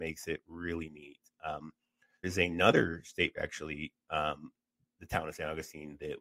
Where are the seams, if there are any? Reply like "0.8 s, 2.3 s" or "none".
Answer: 2.2 s, 3.3 s, 4.9 s